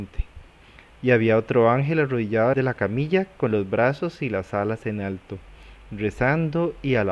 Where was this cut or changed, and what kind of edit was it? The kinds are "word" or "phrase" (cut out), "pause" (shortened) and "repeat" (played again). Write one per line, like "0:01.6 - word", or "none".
0:02.5 - phrase